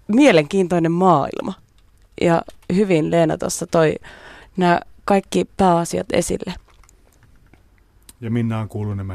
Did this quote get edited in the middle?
no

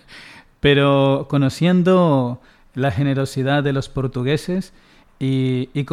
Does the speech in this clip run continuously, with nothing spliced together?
yes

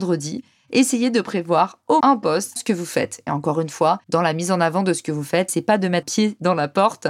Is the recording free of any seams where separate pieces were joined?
no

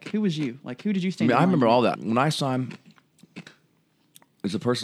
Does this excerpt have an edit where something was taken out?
yes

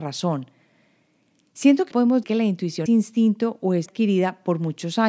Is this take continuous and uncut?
no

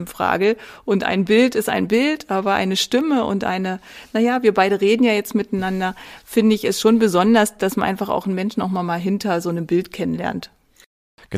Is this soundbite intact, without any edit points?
yes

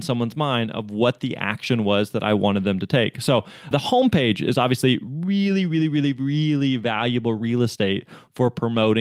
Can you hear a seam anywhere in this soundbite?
yes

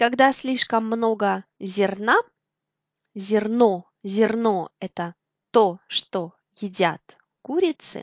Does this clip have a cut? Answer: no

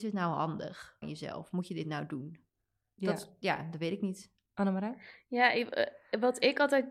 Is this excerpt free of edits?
no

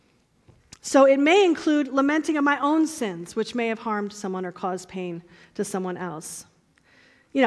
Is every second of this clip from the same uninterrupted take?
yes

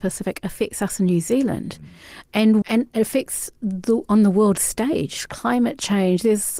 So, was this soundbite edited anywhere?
yes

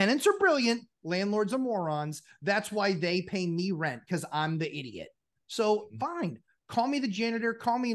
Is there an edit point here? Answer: no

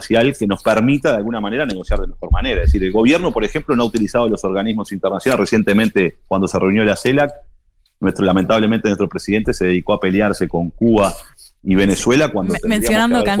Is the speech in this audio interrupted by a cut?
no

